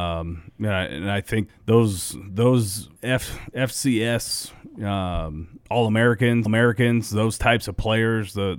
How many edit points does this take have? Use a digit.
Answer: 4